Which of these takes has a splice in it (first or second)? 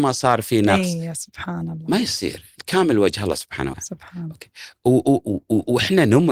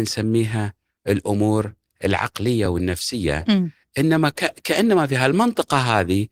first